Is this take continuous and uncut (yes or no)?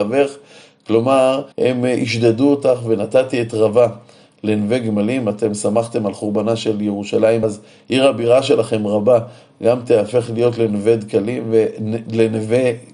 no